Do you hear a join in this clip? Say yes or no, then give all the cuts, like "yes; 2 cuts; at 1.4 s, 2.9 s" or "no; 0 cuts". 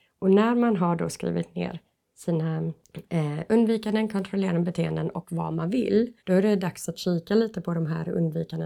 yes; 2 cuts; at 2.8 s, 6.2 s